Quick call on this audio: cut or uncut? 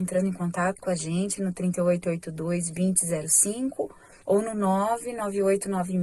cut